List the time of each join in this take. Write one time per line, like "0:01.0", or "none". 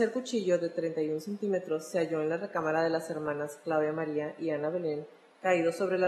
none